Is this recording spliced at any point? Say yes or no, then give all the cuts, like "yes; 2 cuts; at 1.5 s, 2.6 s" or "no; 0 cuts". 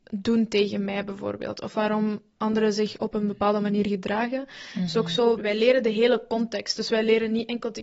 yes; 1 cut; at 5.4 s